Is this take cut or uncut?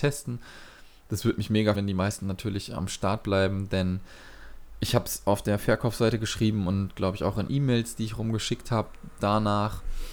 cut